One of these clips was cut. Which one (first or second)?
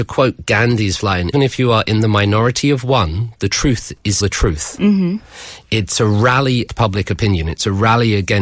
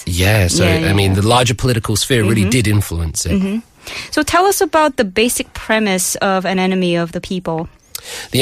first